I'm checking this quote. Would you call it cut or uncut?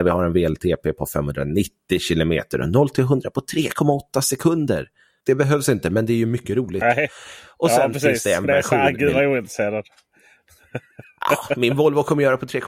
uncut